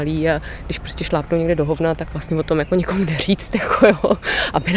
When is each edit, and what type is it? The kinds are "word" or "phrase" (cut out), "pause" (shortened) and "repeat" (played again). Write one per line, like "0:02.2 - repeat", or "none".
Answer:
none